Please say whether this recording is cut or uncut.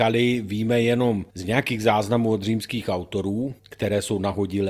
cut